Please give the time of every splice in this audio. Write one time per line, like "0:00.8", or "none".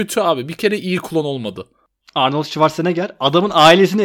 none